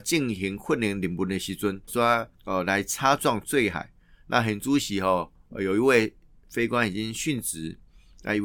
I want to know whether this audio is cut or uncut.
cut